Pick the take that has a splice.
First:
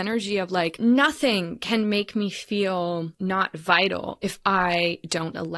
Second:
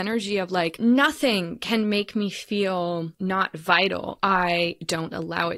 second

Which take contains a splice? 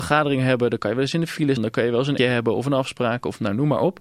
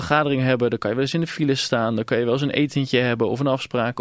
first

